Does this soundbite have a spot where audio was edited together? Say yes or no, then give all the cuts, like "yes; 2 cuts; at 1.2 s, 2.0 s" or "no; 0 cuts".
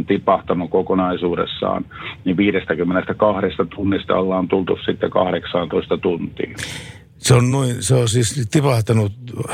no; 0 cuts